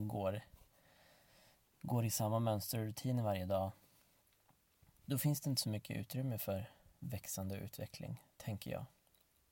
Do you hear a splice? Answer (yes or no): no